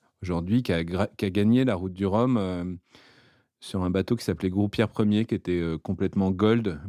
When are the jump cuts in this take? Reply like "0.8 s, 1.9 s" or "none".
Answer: none